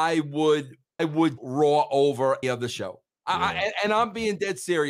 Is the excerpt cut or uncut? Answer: cut